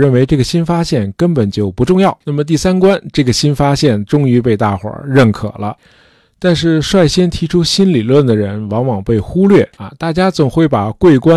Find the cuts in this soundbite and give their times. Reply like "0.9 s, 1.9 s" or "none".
2.2 s, 9.7 s